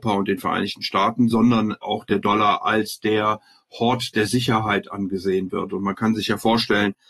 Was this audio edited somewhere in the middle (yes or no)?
no